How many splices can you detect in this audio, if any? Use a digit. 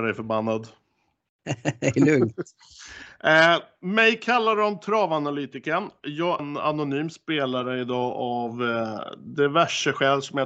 1